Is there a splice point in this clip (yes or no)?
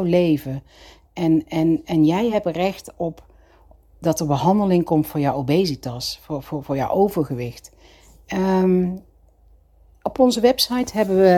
no